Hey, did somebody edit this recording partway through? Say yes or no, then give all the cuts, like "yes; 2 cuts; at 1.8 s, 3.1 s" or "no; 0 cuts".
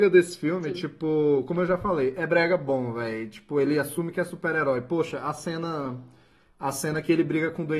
no; 0 cuts